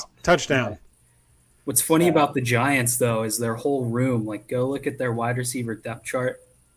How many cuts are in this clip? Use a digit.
0